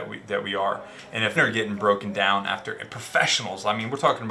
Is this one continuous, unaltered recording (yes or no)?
no